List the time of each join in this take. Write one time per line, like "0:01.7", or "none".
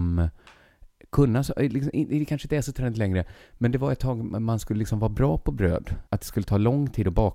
0:06.1